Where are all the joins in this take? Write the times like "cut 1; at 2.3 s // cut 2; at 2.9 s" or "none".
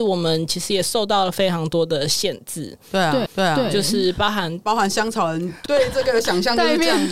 cut 1; at 3.3 s // cut 2; at 5.7 s